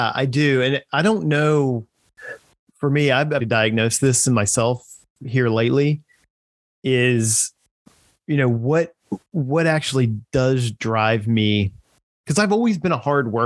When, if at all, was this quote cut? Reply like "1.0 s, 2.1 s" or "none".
3.4 s